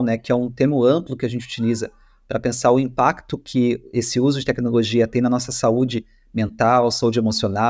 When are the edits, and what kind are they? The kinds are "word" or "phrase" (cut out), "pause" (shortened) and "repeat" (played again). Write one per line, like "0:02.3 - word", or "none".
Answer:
none